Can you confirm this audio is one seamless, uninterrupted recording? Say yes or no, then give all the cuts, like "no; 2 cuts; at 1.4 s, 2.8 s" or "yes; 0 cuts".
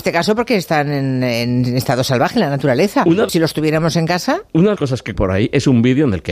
no; 3 cuts; at 3.3 s, 4.8 s, 5.1 s